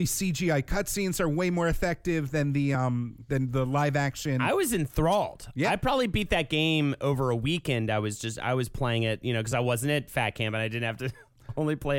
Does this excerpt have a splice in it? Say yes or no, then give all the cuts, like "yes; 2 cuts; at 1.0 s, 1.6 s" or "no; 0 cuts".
no; 0 cuts